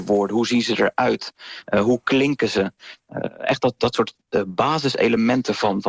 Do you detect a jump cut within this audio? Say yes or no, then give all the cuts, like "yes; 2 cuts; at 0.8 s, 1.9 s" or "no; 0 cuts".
no; 0 cuts